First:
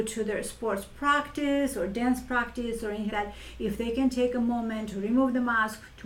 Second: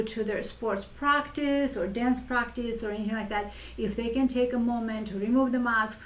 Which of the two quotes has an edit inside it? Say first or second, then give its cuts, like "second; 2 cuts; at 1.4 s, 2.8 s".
first; 1 cut; at 3.1 s